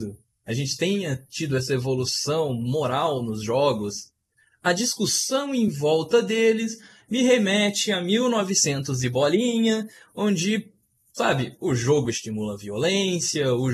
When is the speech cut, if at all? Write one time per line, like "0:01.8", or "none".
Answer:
none